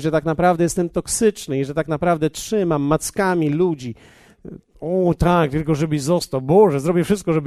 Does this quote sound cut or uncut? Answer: uncut